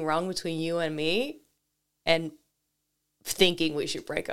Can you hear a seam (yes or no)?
no